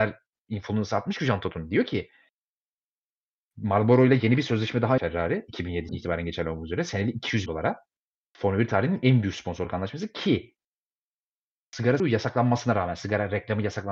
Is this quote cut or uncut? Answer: cut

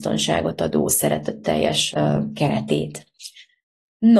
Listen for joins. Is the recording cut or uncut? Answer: cut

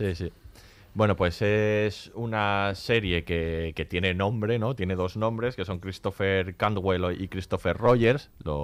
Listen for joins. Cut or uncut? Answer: uncut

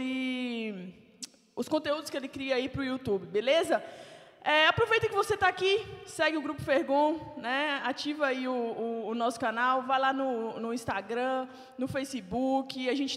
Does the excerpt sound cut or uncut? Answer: uncut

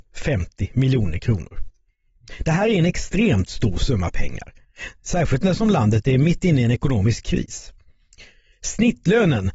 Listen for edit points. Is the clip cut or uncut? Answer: uncut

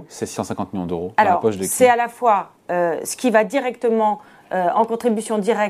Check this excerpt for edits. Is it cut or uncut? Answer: uncut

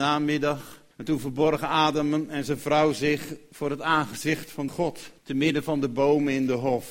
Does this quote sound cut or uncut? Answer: cut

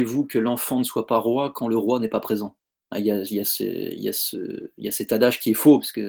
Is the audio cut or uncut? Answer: cut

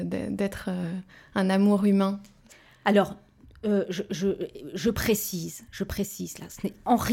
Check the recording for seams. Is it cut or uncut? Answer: uncut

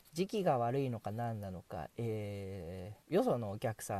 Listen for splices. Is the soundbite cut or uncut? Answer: cut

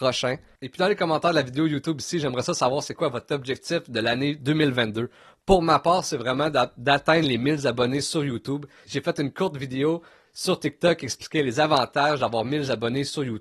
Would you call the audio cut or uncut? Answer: uncut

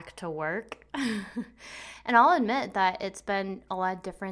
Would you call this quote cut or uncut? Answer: uncut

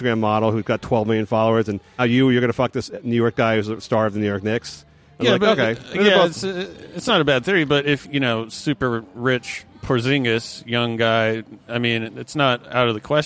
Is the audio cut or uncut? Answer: cut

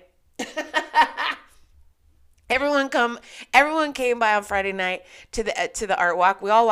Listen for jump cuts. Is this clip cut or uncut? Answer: uncut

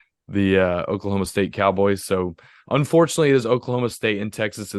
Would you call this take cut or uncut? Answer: uncut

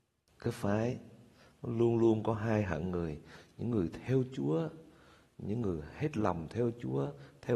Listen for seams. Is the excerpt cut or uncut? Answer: uncut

